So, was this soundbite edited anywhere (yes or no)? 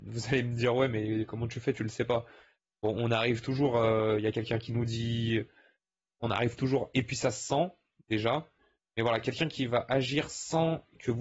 no